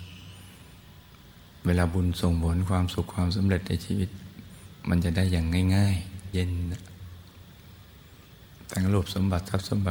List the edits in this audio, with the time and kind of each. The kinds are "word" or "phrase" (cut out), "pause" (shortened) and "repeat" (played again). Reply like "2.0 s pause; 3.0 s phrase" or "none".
6.3 s word